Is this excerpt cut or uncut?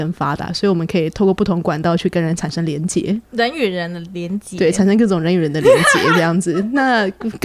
uncut